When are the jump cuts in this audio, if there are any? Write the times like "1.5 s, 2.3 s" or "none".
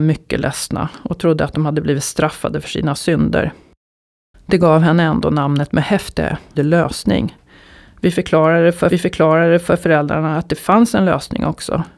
6.6 s, 8.9 s